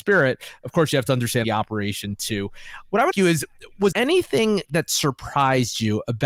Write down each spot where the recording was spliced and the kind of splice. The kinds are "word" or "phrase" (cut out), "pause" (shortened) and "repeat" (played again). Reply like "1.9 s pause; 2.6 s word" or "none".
1.4 s phrase; 3.1 s word; 3.9 s word